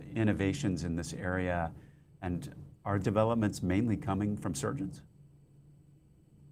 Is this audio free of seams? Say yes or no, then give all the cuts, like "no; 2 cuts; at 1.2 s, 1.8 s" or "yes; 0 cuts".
no; 1 cut; at 3.0 s